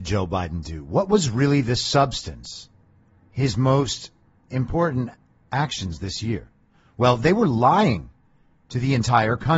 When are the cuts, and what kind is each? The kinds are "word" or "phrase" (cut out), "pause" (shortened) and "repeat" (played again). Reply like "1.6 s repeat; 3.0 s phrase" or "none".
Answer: none